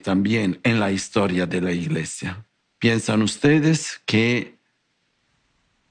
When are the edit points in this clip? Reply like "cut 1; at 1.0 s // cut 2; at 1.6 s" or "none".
none